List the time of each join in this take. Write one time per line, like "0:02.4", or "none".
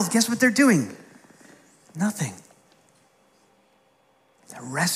none